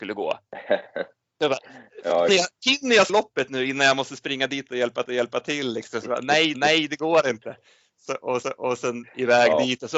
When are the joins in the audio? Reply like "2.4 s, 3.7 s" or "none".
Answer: 2.3 s, 3.1 s, 5.1 s, 6.5 s, 8.4 s